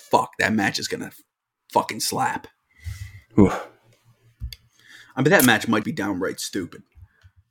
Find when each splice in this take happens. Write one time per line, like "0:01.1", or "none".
0:05.8